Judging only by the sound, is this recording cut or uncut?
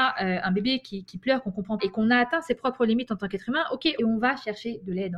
cut